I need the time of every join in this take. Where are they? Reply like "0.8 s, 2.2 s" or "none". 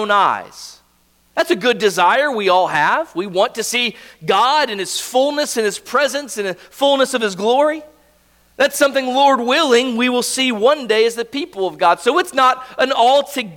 none